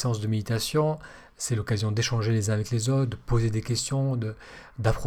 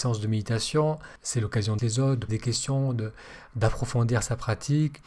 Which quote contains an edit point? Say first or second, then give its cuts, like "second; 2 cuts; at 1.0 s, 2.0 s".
second; 3 cuts; at 1.2 s, 1.8 s, 2.3 s